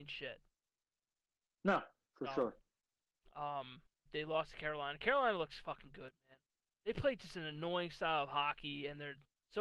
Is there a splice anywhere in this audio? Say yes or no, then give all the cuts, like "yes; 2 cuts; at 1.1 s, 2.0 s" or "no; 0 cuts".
yes; 2 cuts; at 4.1 s, 6.5 s